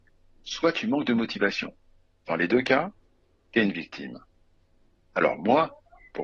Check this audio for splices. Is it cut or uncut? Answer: uncut